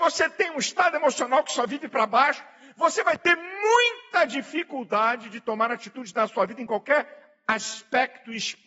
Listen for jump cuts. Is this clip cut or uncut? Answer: uncut